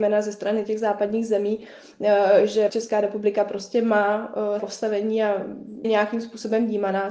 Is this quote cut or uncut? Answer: cut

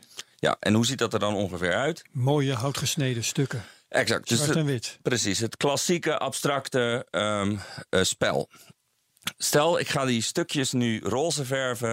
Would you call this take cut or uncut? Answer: uncut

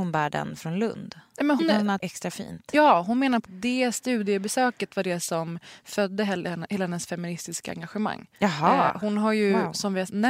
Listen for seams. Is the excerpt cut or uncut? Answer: cut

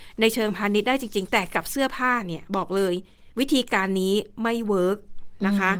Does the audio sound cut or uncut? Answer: cut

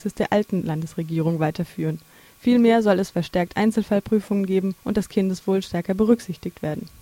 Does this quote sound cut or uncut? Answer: cut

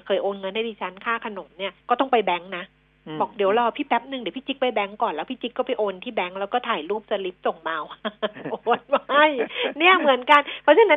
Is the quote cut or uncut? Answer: cut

